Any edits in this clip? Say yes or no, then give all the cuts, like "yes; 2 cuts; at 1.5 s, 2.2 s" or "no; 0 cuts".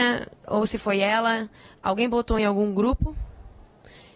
no; 0 cuts